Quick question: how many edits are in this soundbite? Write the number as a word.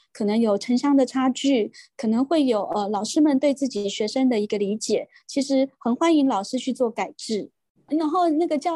zero